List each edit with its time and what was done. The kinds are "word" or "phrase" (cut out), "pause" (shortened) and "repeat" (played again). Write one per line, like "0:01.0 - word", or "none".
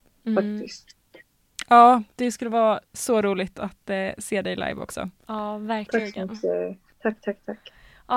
0:02.1 - pause
0:02.9 - pause
0:06.9 - pause